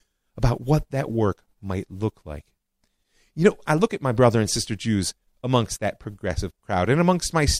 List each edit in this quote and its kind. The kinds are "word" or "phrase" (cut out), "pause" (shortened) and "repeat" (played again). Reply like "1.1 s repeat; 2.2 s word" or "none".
none